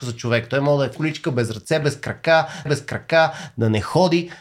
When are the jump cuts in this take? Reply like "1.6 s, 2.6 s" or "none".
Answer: 1.0 s, 2.7 s